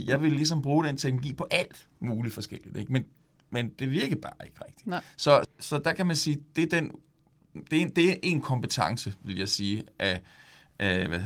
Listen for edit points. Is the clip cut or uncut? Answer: cut